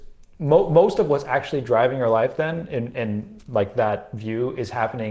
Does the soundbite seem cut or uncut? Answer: uncut